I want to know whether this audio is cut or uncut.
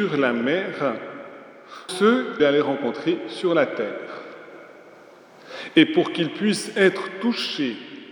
cut